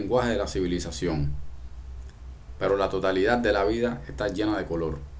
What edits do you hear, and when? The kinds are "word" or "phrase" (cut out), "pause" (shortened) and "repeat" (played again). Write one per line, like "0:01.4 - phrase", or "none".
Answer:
none

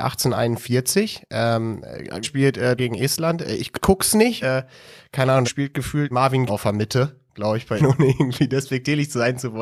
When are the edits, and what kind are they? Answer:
0:02.2 - word
0:02.8 - word
0:03.8 - word
0:04.4 - word
0:05.4 - word
0:06.1 - word
0:06.5 - word
0:07.8 - word

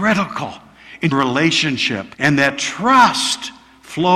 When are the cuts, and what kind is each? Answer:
0:01.1 - word
0:02.1 - pause

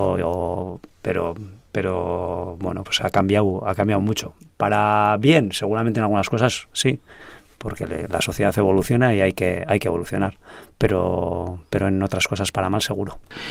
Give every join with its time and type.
none

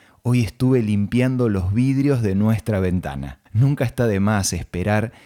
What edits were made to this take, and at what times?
0:03.5 - pause

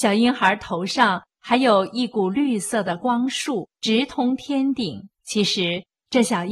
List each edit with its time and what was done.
0:03.7 - pause
0:05.1 - pause

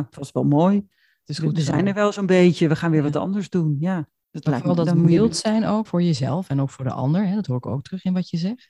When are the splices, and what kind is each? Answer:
0:05.9 - word

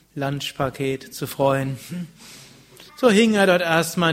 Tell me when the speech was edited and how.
0:02.9 - pause

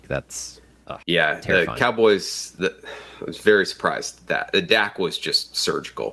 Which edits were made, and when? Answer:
0:01.0 - pause

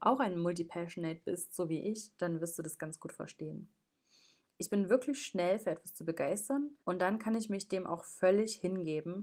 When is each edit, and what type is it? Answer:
0:06.8 - pause

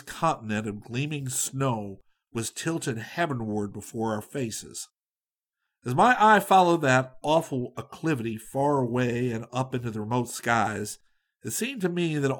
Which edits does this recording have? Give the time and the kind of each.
none

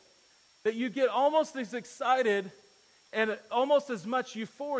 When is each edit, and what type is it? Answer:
none

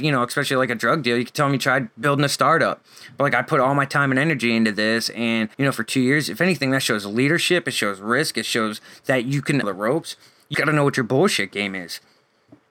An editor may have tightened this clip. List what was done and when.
0:05.5 - pause
0:09.6 - phrase
0:10.5 - word

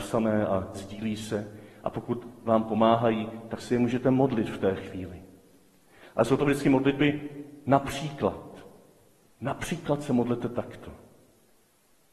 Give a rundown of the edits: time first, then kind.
none

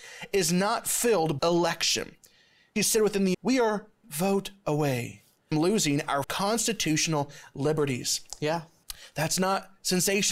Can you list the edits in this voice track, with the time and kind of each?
0:01.4 - word
0:02.8 - word
0:03.3 - word
0:04.0 - word
0:05.5 - word
0:06.2 - word

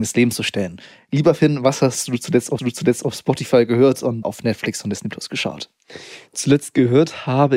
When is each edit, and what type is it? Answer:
0:02.6 - repeat
0:04.2 - word

